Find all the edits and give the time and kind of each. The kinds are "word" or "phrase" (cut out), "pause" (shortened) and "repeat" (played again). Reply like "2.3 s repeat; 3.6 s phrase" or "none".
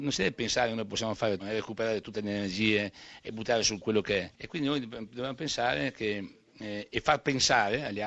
1.4 s word; 3.8 s word; 4.3 s pause